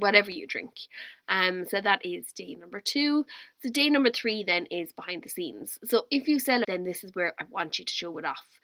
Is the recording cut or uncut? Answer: cut